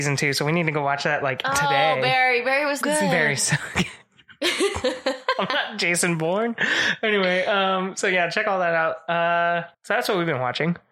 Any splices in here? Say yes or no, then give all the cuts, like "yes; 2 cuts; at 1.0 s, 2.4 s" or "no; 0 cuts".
yes; 2 cuts; at 2.8 s, 9.7 s